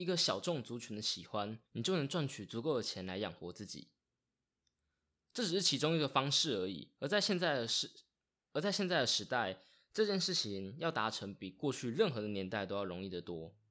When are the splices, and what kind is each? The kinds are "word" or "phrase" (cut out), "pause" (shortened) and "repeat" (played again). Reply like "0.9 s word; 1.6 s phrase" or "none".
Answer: 1.7 s pause